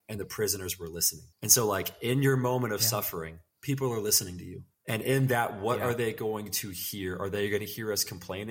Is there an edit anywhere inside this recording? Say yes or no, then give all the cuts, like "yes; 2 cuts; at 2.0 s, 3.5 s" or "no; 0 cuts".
yes; 3 cuts; at 1.3 s, 3.5 s, 4.7 s